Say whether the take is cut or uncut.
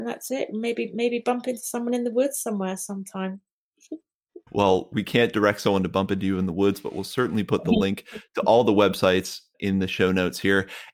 uncut